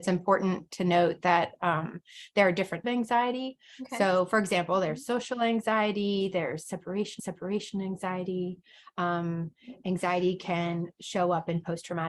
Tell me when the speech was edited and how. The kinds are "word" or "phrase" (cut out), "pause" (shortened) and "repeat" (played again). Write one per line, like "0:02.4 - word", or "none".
0:02.8 - phrase
0:07.2 - repeat